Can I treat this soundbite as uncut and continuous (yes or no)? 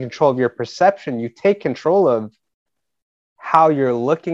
yes